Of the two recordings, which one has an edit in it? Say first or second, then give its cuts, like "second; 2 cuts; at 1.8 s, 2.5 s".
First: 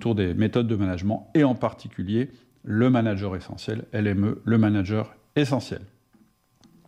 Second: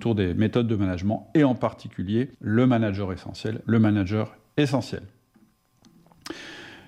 second; 2 cuts; at 2.3 s, 3.6 s